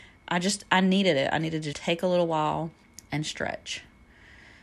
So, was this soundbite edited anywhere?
yes; 2 cuts; at 1.7 s, 2.8 s

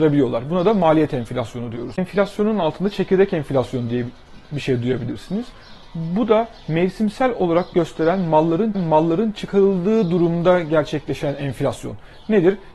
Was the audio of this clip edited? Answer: yes; 2 cuts; at 7.7 s, 8.7 s

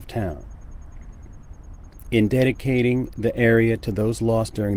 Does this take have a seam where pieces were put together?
no; 0 cuts

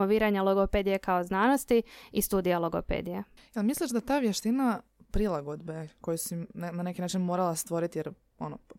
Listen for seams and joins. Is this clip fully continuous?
yes; 0 cuts

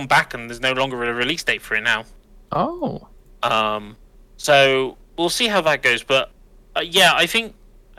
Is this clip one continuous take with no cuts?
yes; 0 cuts

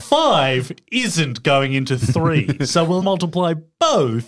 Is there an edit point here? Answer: yes; 1 cut; at 3.0 s

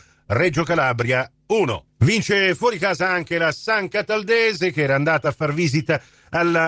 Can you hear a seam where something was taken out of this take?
no; 0 cuts

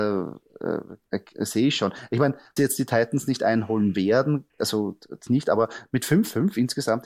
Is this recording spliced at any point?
yes; 4 cuts; at 1.0 s, 2.6 s, 4.5 s, 5.3 s

